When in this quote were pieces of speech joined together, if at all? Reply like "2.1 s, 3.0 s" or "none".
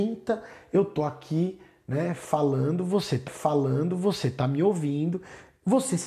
3.3 s